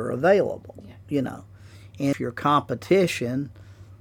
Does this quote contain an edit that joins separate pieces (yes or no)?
yes